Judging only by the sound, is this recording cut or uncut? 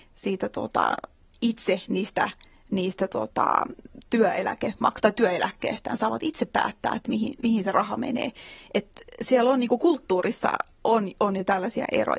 uncut